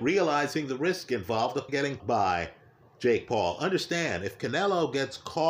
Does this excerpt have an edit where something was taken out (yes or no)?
yes